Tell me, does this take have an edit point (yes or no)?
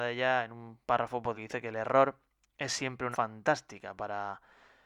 yes